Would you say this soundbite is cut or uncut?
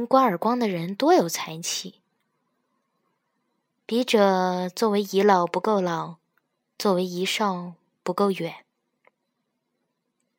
uncut